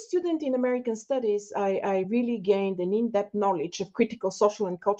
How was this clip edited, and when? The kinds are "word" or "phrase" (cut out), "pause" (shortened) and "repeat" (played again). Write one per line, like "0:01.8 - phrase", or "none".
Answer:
none